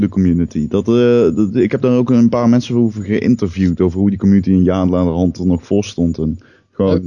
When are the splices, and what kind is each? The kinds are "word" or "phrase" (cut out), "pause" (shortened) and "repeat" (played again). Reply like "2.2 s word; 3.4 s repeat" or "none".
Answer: none